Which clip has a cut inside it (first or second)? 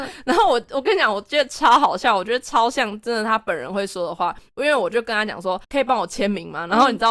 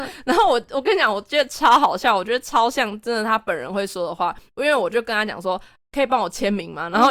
first